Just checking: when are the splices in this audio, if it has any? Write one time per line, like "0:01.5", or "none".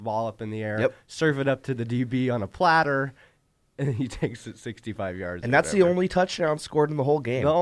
none